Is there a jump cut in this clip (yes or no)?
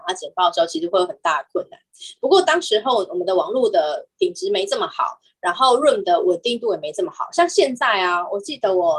no